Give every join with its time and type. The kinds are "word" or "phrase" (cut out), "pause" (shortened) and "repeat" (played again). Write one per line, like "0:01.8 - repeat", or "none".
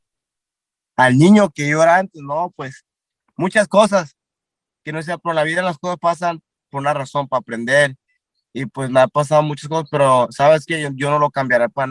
none